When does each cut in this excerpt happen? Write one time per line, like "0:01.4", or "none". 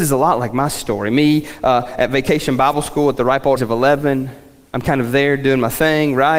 0:03.6